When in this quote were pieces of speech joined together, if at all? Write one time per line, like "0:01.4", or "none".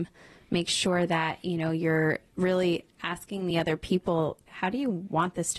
none